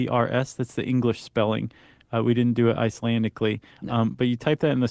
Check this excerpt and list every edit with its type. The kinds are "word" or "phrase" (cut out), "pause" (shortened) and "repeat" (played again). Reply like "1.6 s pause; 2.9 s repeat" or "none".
none